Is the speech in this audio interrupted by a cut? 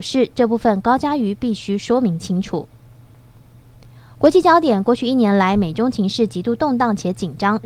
no; 0 cuts

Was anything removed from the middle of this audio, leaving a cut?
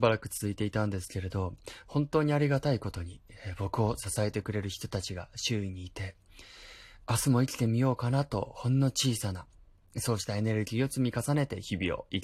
no; 0 cuts

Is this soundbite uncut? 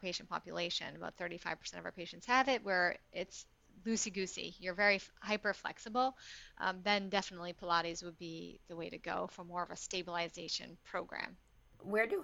yes; 0 cuts

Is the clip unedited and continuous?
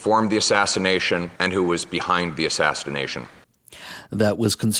no; 1 cut; at 1.4 s

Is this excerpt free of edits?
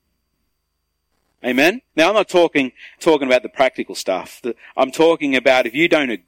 no; 2 cuts; at 1.9 s, 3.0 s

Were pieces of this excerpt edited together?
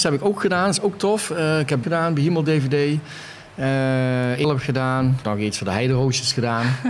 yes; 3 cuts; at 1.8 s, 4.4 s, 5.2 s

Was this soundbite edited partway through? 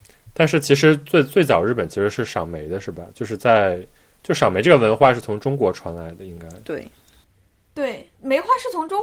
yes; 1 cut; at 8.1 s

